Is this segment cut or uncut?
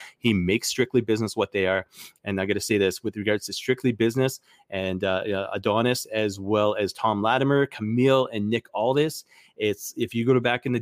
uncut